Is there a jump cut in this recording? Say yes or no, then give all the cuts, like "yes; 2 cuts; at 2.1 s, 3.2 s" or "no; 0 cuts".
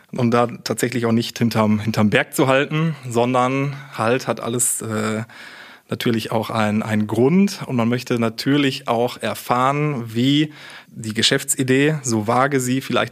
yes; 1 cut; at 10.9 s